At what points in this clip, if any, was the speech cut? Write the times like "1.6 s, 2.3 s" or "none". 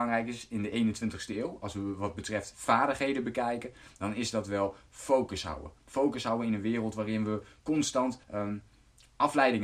5.8 s, 8.2 s

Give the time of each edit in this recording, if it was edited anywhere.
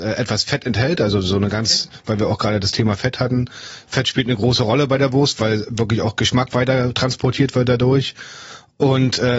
none

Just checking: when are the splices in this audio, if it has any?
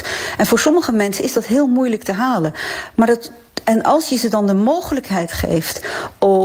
none

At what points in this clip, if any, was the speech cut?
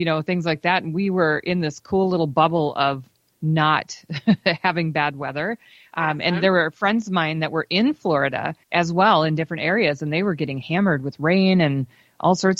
8.6 s

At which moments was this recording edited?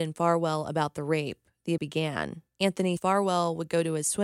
1.8 s, 3.0 s

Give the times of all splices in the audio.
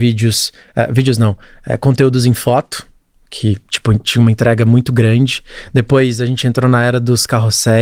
none

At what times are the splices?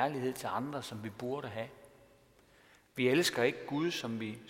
none

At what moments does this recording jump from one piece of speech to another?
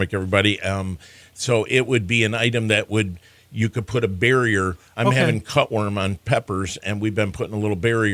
none

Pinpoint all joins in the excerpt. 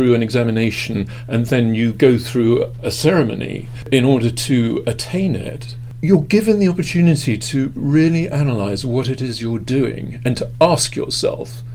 none

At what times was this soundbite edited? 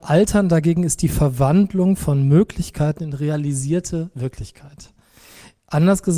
none

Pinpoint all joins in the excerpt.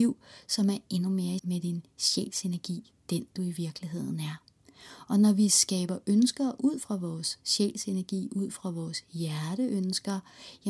1.4 s

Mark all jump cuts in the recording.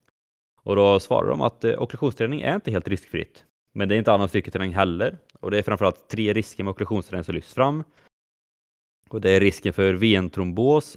none

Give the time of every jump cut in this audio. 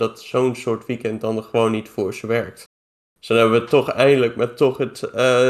none

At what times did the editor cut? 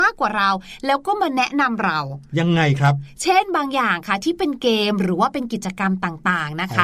2.3 s

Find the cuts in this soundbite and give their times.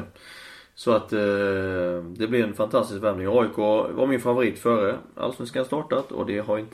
none

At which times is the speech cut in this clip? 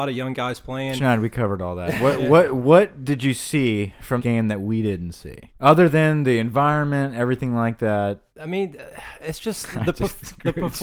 4.2 s, 5.5 s, 8.3 s

